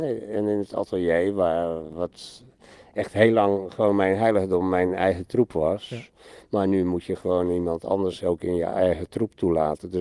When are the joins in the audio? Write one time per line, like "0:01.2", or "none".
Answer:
none